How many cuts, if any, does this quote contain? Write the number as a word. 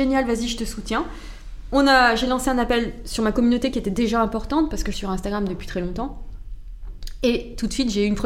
one